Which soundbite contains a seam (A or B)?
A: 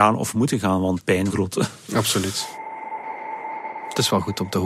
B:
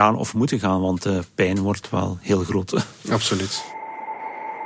A